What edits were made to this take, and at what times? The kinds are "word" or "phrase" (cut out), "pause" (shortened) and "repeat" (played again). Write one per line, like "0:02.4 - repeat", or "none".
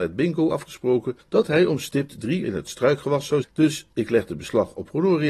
0:01.2 - pause
0:02.4 - word
0:03.4 - word